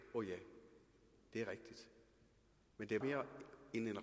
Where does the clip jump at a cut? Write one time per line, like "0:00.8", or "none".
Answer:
0:03.0